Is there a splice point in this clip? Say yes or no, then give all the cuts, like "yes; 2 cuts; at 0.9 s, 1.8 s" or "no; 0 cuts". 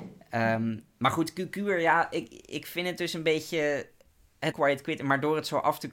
yes; 1 cut; at 4.5 s